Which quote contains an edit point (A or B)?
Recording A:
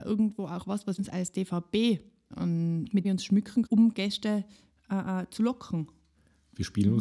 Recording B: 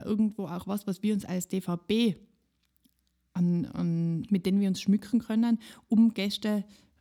A